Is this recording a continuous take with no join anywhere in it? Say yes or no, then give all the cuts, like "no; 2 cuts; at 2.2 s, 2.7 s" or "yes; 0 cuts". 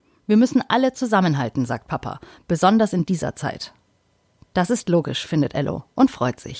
yes; 0 cuts